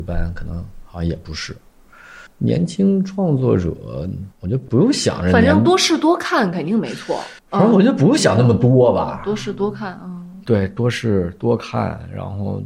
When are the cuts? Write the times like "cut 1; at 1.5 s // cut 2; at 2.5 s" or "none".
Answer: cut 1; at 2.3 s // cut 2; at 4.3 s // cut 3; at 7.4 s